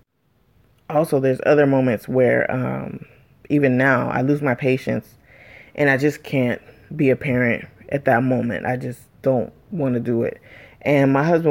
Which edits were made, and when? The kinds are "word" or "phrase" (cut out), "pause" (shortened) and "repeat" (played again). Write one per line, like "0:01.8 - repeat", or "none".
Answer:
none